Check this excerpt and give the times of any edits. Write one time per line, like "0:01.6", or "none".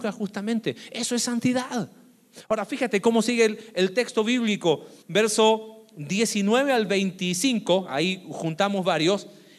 0:05.0

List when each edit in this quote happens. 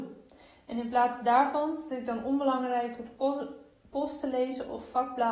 none

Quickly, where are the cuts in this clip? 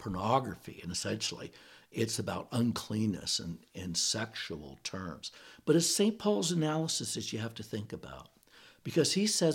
none

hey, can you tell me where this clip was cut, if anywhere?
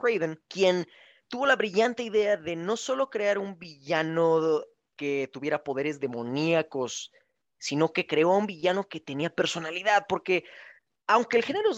none

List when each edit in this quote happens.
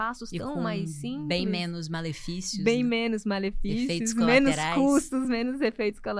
none

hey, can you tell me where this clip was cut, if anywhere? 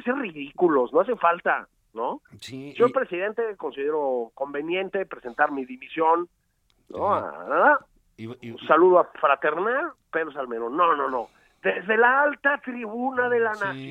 none

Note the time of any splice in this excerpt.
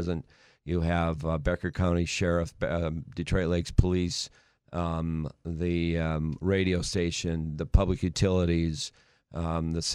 none

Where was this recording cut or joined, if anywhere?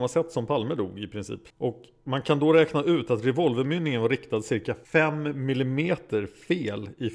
0:01.5
0:04.8

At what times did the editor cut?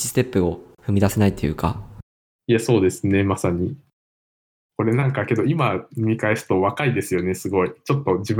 none

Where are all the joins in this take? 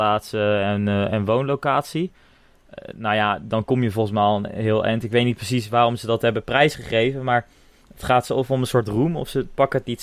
none

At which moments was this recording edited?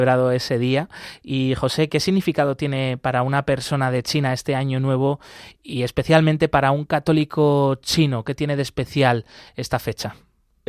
none

